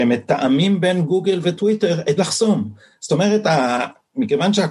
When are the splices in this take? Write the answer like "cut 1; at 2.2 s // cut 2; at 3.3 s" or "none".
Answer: cut 1; at 2.2 s